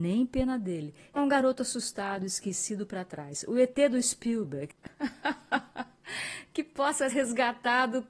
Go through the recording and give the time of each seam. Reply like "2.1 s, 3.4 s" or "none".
1.2 s, 7.1 s